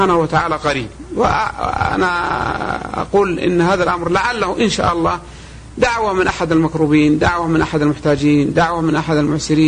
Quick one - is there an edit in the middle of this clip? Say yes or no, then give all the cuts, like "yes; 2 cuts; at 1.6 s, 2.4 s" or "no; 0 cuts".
no; 0 cuts